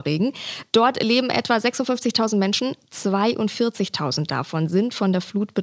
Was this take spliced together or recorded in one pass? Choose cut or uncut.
uncut